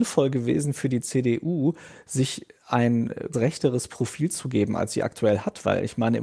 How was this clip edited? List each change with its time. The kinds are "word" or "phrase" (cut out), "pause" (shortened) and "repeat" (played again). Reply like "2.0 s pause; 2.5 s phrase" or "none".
3.3 s word